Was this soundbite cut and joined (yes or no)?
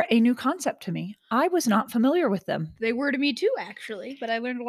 no